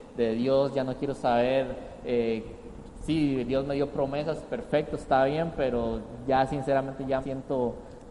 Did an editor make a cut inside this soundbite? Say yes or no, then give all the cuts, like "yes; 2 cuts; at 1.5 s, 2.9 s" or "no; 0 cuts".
yes; 1 cut; at 7.2 s